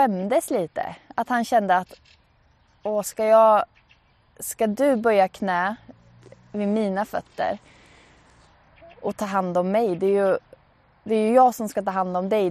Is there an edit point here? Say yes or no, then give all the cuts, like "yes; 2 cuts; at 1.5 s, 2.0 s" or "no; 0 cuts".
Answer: no; 0 cuts